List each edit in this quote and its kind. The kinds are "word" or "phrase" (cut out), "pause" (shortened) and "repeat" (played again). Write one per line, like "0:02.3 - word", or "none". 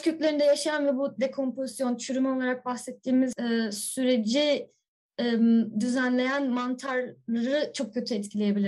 none